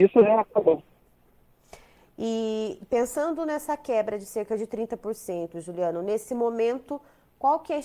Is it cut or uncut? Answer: uncut